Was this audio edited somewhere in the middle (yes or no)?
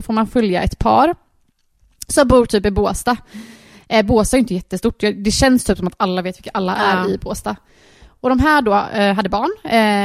no